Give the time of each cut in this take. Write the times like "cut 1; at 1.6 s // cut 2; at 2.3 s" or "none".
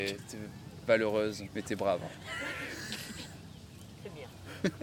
cut 1; at 1.5 s